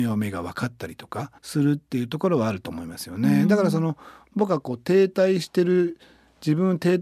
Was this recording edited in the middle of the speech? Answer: yes; 1 cut; at 1.4 s

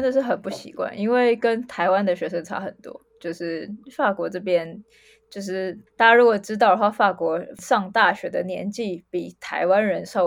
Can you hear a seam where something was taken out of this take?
yes; 1 cut; at 5.9 s

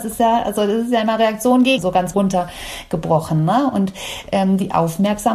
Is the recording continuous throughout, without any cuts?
no; 2 cuts; at 1.8 s, 2.1 s

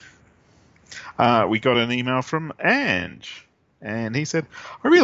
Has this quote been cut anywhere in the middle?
no; 0 cuts

